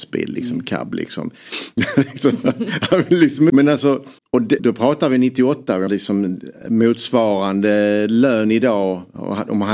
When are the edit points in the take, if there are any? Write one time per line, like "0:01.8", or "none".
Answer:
0:03.5
0:04.2
0:04.6
0:05.9